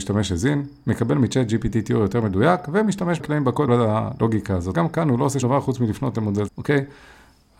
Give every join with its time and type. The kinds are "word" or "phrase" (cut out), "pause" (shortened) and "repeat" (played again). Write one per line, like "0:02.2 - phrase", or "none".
0:03.2 - word
0:03.7 - word
0:04.7 - word
0:05.4 - word
0:06.5 - word